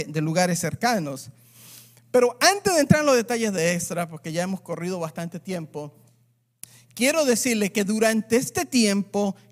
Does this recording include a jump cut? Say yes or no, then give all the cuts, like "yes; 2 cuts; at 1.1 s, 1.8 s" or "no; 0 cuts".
no; 0 cuts